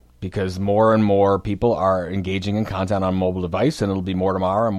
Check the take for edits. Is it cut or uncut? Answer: uncut